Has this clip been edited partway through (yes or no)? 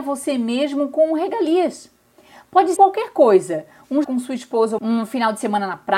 yes